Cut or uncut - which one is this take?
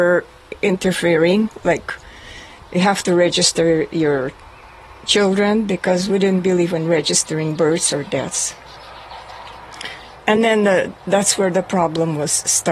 uncut